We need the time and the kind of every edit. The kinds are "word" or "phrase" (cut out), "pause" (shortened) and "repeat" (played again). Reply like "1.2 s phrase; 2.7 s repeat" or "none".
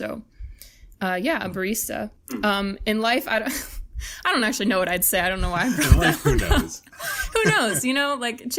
none